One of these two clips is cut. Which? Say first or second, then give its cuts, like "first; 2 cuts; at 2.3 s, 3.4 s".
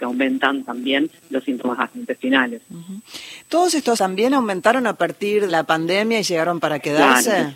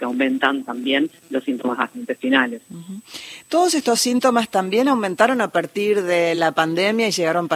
first; 2 cuts; at 4.0 s, 5.5 s